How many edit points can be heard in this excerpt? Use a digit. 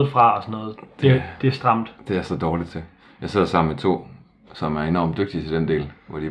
0